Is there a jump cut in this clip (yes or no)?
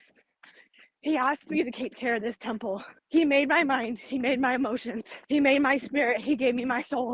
yes